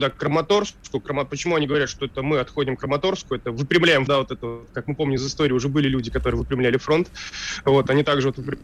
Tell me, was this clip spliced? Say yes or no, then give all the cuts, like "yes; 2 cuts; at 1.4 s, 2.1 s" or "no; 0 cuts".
yes; 1 cut; at 4.1 s